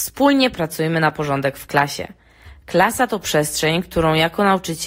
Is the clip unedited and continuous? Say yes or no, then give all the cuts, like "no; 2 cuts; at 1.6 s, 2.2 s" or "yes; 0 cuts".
yes; 0 cuts